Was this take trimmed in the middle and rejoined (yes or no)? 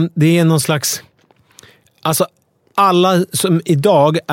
no